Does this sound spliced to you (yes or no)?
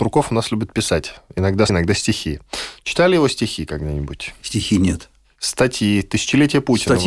yes